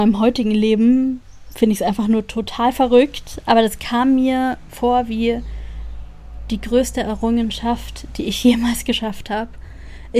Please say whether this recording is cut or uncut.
uncut